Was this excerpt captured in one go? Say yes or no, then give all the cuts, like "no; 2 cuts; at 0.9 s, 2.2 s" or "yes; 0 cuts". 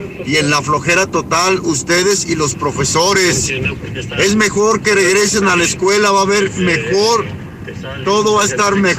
yes; 0 cuts